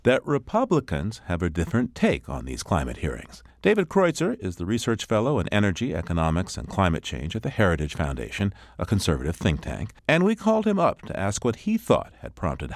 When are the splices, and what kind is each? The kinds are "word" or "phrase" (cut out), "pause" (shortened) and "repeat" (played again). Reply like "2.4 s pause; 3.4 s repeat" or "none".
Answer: 3.5 s pause; 10.0 s pause